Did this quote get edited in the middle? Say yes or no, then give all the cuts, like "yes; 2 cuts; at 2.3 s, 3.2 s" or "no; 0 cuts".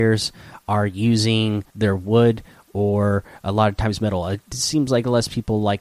yes; 1 cut; at 1.7 s